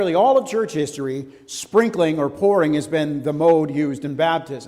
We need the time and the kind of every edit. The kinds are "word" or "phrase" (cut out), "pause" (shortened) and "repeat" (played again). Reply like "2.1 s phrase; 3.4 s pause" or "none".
none